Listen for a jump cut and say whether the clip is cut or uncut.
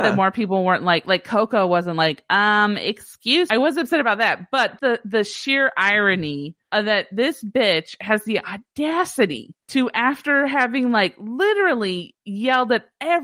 cut